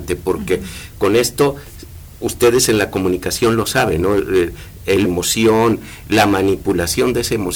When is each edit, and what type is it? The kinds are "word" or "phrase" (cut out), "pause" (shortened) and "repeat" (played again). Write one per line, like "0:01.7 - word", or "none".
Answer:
0:05.0 - phrase